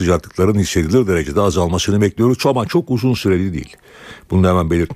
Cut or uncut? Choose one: uncut